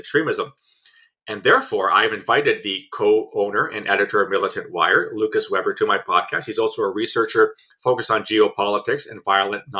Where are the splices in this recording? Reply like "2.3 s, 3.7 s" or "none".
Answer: 7.6 s